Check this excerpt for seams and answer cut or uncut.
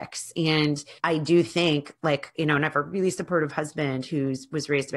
cut